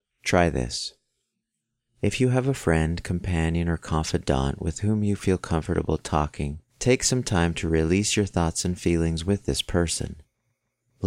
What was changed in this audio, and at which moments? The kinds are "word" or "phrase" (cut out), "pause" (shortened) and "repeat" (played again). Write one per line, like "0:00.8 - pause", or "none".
none